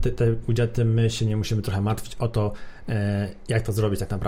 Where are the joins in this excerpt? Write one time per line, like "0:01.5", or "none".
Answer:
none